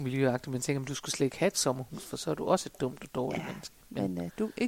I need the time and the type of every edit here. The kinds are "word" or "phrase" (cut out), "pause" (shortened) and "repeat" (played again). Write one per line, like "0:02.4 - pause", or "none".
none